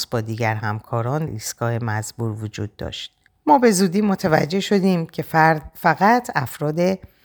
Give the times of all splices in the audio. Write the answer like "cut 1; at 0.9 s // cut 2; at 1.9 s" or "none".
cut 1; at 1.3 s // cut 2; at 3.3 s